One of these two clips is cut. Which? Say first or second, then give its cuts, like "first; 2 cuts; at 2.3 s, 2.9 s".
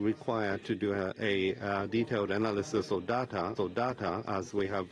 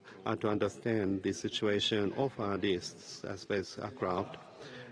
first; 1 cut; at 3.6 s